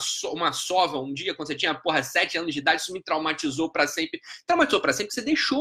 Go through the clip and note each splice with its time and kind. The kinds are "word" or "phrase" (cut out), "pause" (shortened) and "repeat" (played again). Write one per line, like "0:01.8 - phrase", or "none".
none